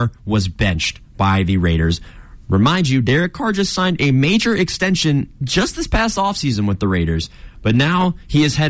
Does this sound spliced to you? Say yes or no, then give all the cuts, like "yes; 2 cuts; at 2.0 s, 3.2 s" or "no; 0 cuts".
no; 0 cuts